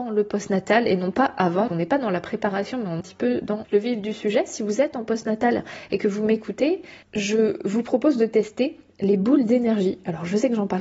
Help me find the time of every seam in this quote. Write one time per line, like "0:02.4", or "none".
0:01.7
0:03.0
0:03.6
0:07.0